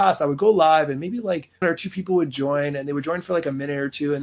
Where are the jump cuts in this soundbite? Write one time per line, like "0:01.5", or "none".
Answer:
0:01.6